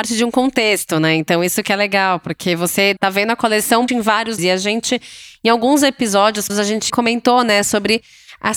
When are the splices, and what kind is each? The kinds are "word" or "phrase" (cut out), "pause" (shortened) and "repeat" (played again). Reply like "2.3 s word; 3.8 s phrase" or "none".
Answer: 3.0 s word; 3.9 s word; 4.4 s word; 6.5 s word; 6.9 s word